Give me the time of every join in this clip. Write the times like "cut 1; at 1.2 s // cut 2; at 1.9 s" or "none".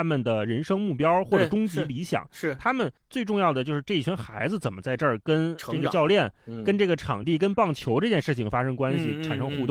cut 1; at 3.0 s